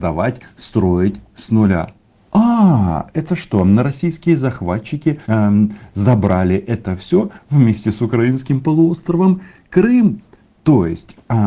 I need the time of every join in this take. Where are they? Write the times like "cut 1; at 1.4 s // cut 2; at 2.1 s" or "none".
cut 1; at 5.2 s